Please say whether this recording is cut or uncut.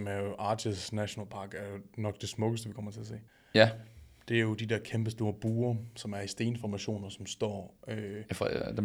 cut